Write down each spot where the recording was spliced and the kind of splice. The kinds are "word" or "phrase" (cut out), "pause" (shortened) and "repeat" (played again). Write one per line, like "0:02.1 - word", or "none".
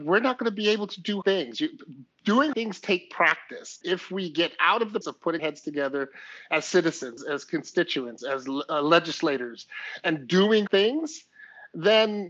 0:01.2 - word
0:02.5 - word
0:03.8 - word
0:05.0 - word
0:05.4 - word
0:07.2 - word
0:08.2 - word
0:10.7 - word